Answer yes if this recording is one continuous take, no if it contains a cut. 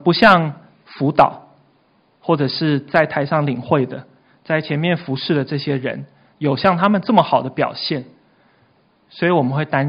yes